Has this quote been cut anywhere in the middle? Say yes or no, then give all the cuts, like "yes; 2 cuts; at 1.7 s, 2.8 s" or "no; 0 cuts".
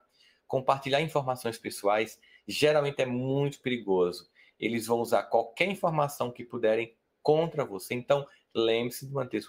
no; 0 cuts